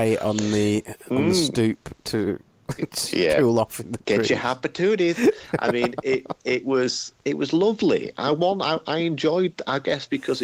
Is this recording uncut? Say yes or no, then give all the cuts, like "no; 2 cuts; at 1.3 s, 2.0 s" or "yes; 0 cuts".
no; 1 cut; at 7.2 s